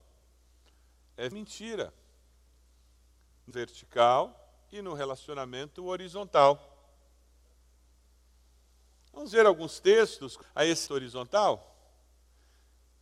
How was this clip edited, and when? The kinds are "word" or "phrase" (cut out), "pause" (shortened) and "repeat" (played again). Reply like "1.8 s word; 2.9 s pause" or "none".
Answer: 1.3 s phrase; 3.5 s word; 10.4 s word; 10.9 s word